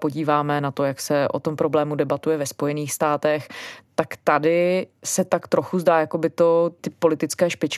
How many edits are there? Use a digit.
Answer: 0